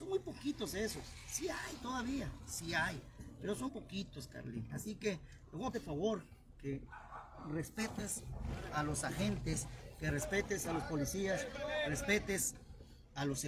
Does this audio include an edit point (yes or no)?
yes